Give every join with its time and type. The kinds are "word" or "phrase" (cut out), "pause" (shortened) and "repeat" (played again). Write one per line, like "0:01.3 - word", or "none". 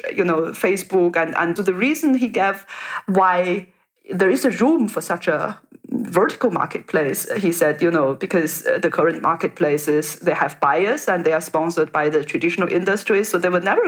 0:01.6 - word